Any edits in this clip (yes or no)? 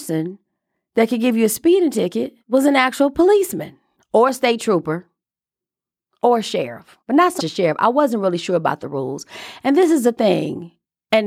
yes